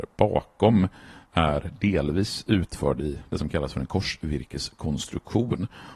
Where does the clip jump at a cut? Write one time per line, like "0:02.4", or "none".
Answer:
none